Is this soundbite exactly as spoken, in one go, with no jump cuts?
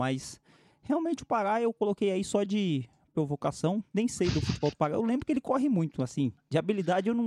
yes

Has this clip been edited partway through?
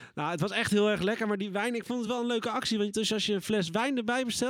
no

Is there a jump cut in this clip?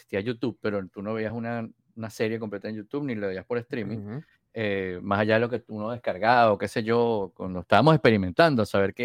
no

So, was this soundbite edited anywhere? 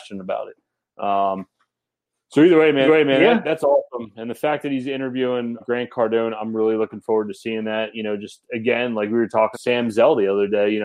yes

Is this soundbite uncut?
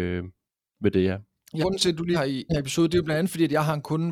no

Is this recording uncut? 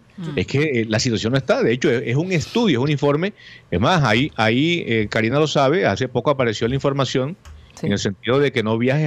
yes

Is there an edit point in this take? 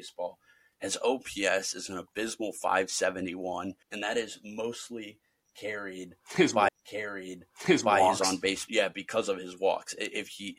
yes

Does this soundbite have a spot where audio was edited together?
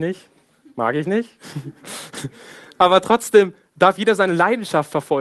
no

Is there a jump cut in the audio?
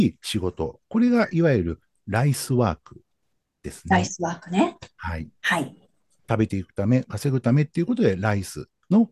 no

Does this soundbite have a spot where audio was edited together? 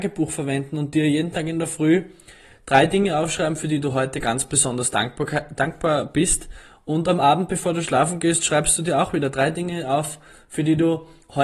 no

